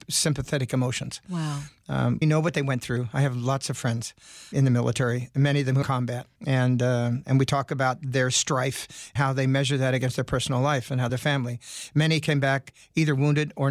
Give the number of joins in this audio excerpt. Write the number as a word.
six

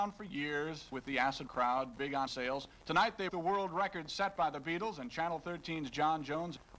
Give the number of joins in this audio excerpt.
four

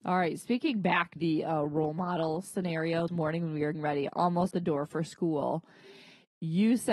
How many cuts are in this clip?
four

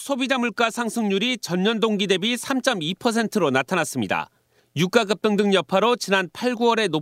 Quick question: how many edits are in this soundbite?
zero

